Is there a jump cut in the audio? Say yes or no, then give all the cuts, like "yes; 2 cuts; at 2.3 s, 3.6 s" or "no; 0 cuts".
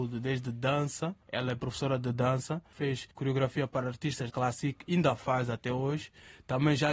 yes; 3 cuts; at 1.2 s, 3.1 s, 4.3 s